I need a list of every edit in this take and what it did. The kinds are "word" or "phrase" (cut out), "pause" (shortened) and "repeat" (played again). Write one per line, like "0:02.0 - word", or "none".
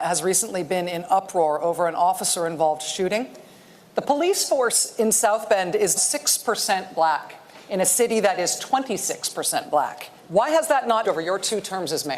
0:06.0 - word
0:10.2 - pause
0:11.0 - word